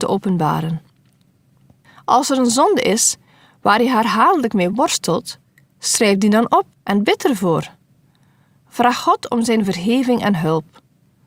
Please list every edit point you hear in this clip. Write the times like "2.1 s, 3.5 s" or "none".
none